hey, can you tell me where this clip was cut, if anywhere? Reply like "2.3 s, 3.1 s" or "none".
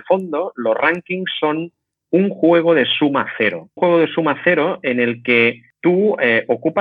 3.8 s